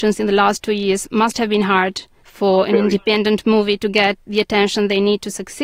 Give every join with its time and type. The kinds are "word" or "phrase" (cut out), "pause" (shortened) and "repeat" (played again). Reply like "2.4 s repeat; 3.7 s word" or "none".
none